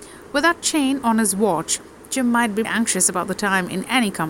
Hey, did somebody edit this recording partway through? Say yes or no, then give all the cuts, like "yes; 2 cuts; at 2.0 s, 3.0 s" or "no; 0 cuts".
yes; 1 cut; at 2.6 s